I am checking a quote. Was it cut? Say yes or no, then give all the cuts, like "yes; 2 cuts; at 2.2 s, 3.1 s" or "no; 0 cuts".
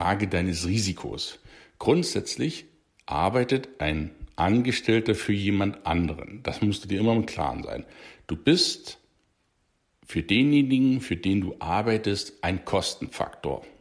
no; 0 cuts